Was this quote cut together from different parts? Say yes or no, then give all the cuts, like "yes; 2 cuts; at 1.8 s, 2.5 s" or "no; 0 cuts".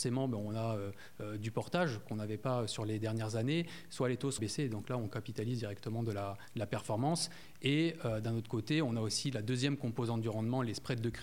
yes; 1 cut; at 4.4 s